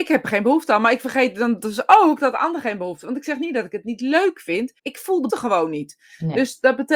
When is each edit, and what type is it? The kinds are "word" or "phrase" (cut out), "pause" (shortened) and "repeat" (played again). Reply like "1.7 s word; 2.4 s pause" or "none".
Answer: 4.8 s pause; 5.3 s word